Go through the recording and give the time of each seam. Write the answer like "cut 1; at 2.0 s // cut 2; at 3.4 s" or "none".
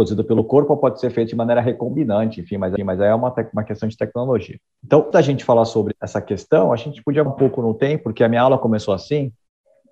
cut 1; at 2.8 s // cut 2; at 5.1 s // cut 3; at 7.3 s